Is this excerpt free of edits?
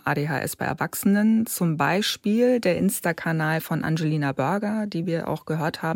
yes; 0 cuts

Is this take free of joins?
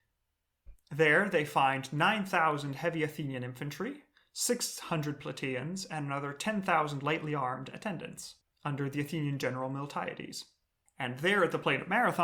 yes; 0 cuts

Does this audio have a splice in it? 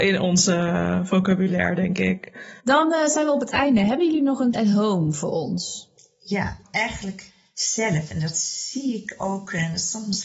yes; 3 cuts; at 2.6 s, 4.5 s, 6.6 s

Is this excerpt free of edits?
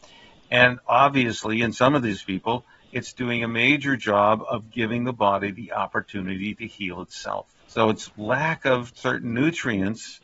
no; 1 cut; at 7.6 s

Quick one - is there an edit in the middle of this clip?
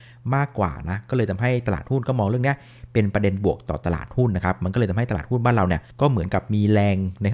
yes; 1 cut; at 5.9 s

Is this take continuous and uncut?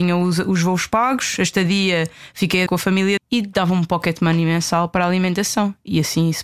no; 2 cuts; at 2.7 s, 3.2 s

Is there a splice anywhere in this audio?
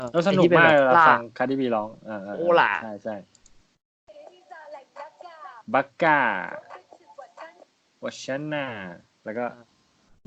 no; 0 cuts

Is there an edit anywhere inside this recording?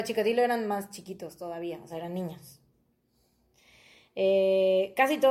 no; 0 cuts

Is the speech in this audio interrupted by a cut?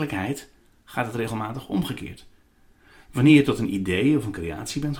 no; 0 cuts

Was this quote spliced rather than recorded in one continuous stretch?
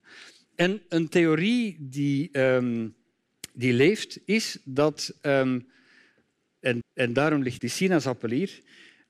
yes; 2 cuts; at 6.8 s, 7.6 s

